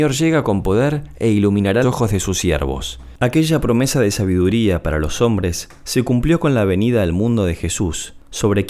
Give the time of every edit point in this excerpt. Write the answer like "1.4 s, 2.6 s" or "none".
1.8 s

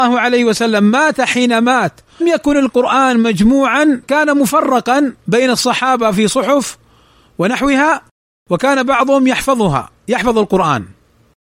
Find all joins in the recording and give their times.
2.2 s, 4.0 s, 5.2 s

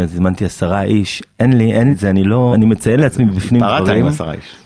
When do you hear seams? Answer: 1.9 s, 2.5 s

